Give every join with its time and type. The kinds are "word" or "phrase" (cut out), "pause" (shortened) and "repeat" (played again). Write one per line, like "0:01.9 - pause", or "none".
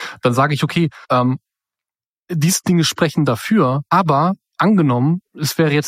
0:01.0 - pause
0:03.9 - pause